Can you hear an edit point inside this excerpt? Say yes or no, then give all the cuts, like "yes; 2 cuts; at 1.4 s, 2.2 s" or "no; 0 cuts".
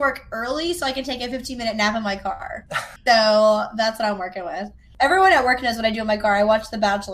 yes; 1 cut; at 3.0 s